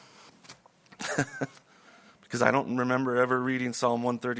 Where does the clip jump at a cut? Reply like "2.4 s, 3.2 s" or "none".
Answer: none